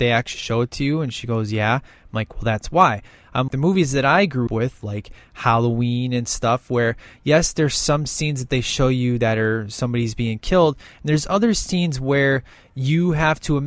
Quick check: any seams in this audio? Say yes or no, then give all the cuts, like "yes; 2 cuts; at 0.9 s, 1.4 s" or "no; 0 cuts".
yes; 2 cuts; at 3.5 s, 4.5 s